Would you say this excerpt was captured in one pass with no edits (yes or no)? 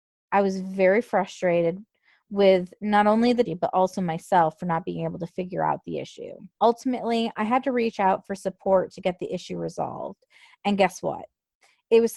no